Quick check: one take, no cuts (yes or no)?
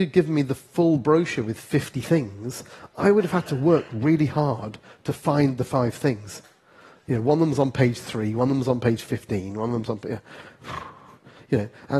yes